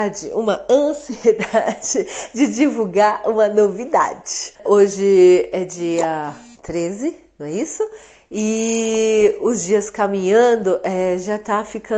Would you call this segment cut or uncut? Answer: cut